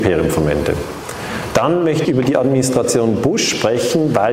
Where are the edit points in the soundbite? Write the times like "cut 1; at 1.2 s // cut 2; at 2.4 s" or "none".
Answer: cut 1; at 2.0 s